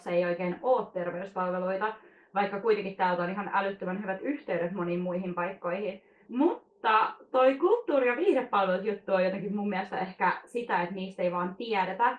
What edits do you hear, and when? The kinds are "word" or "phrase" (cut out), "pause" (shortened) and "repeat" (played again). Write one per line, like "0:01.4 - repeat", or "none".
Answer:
none